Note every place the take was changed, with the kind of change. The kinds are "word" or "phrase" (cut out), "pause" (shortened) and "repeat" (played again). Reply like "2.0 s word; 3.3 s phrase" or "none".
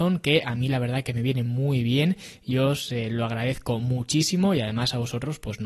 none